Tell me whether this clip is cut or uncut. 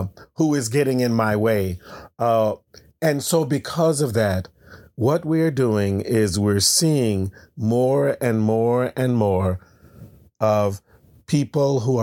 uncut